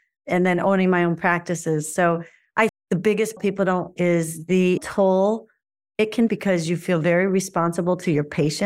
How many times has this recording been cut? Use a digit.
5